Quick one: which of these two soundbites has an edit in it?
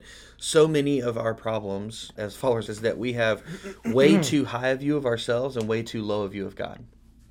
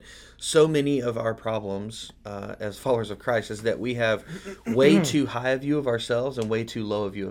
first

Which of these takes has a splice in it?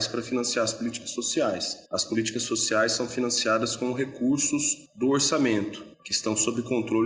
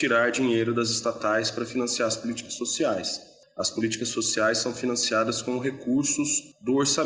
first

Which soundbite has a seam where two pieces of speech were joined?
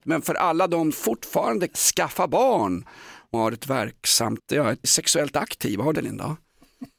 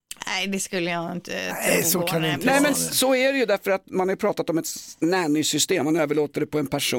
first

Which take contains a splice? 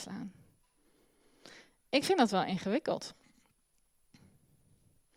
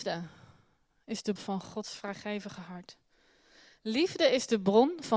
second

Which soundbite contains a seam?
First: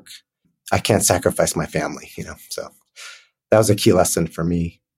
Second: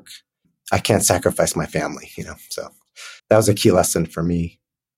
second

